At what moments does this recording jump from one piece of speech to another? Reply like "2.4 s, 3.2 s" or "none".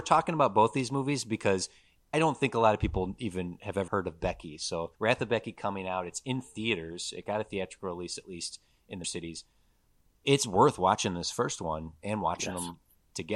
2.1 s, 3.9 s, 4.9 s, 9.0 s